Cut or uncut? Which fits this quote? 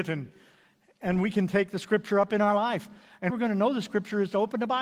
cut